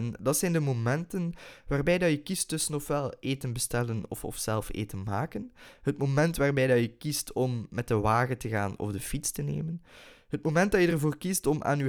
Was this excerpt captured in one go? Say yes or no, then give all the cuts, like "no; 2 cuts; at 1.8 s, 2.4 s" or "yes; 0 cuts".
yes; 0 cuts